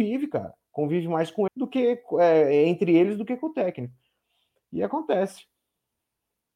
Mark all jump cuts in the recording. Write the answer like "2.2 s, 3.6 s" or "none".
1.5 s

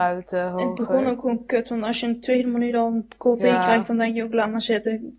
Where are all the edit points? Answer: none

